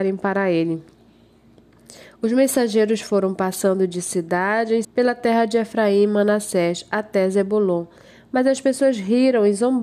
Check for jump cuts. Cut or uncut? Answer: cut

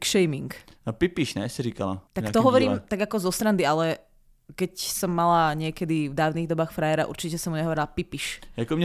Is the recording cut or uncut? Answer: cut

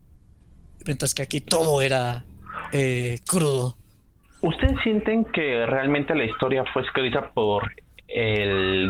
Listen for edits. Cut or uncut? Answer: uncut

